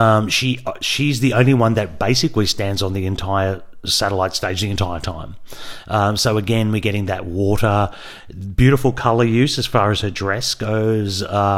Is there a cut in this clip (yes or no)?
no